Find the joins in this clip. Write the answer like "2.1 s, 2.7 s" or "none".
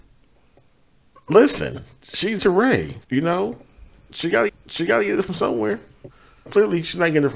2.4 s, 3.0 s, 4.5 s, 6.5 s